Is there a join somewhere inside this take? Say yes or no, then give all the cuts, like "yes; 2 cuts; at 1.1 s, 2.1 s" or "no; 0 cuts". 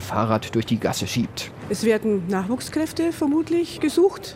no; 0 cuts